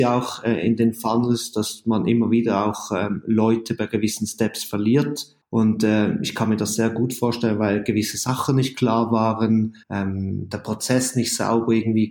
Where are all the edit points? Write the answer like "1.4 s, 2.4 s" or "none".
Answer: 5.4 s, 9.8 s